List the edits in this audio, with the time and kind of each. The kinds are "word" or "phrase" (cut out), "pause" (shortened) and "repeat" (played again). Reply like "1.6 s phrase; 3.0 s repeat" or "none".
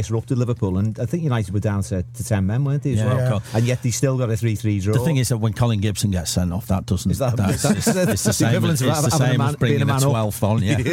none